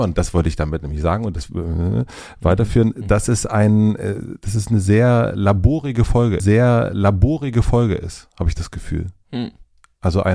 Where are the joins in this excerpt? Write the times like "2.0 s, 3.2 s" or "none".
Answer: 6.4 s